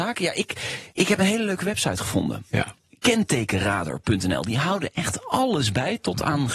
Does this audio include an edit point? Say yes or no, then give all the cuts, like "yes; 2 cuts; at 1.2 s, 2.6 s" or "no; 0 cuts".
yes; 1 cut; at 0.9 s